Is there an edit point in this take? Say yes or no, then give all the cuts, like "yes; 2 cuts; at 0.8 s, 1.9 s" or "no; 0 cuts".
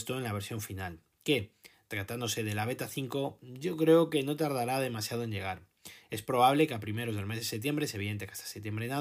no; 0 cuts